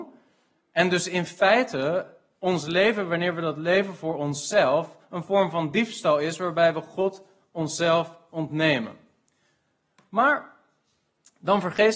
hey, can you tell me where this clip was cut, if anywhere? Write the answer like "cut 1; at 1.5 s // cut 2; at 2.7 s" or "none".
none